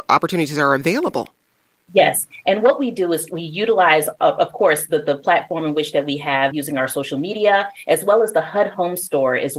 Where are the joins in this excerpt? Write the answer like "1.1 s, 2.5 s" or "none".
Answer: 6.5 s